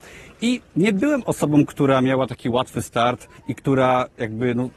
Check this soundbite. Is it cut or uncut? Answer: cut